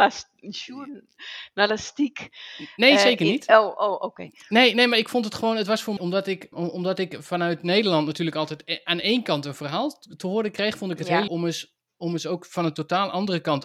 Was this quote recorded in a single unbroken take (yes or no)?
no